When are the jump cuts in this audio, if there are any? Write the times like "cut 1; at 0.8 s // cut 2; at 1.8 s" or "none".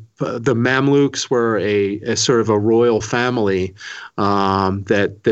none